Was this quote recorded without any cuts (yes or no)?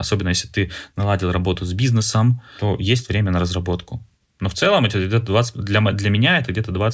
yes